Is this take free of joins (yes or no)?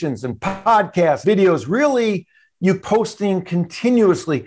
no